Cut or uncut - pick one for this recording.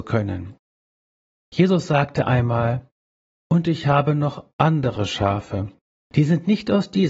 uncut